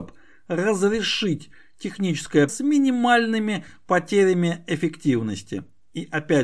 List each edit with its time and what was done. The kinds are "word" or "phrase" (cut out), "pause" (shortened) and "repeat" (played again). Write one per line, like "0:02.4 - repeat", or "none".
0:02.5 - word